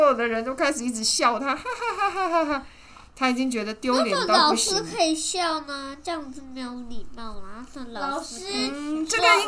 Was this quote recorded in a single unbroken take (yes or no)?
yes